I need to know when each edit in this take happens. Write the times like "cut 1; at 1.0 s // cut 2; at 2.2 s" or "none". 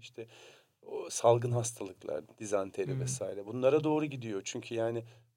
none

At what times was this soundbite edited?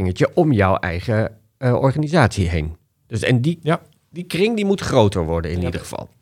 none

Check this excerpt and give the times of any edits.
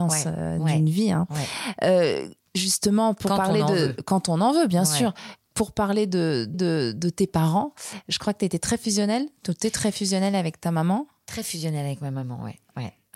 cut 1; at 6.5 s

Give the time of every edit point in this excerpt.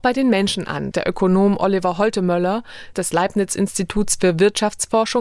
cut 1; at 0.9 s // cut 2; at 2.9 s

